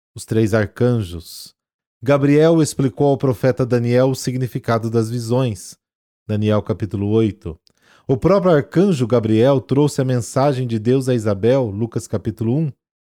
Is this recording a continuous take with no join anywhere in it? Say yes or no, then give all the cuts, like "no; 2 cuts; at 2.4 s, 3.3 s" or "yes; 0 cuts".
yes; 0 cuts